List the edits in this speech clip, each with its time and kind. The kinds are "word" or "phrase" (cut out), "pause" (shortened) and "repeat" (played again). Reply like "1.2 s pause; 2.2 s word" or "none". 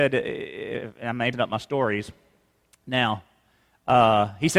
1.3 s word